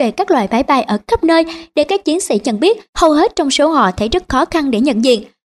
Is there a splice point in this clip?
yes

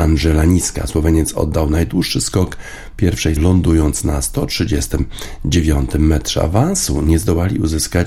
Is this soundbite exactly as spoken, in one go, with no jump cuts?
no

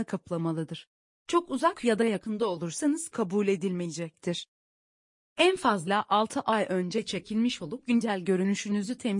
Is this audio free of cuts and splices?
yes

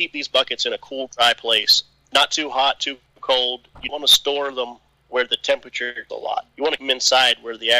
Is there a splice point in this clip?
yes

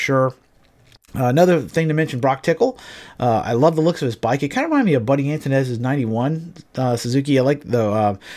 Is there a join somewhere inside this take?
no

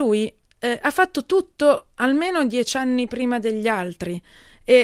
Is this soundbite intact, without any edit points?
yes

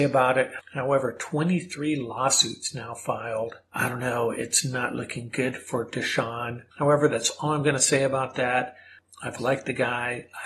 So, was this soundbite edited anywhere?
yes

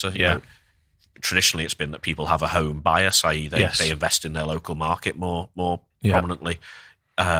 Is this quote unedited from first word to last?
yes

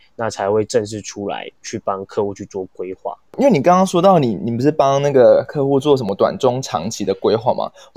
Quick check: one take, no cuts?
no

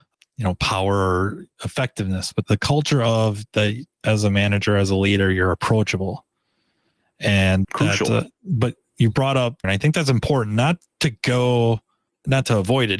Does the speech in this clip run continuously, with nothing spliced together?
no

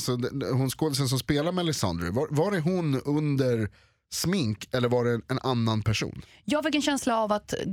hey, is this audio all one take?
yes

